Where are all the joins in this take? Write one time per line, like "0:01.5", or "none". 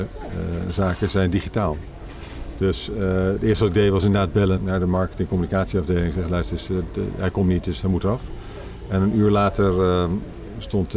0:04.5